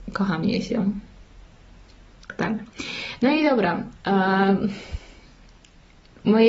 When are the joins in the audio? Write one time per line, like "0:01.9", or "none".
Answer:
0:04.0